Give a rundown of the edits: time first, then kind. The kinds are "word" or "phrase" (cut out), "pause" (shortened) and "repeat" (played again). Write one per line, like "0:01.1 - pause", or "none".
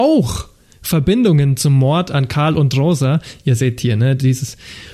none